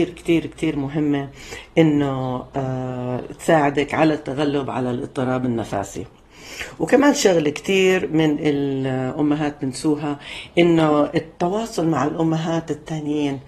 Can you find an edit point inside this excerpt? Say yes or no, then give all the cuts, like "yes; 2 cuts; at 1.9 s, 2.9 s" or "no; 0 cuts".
no; 0 cuts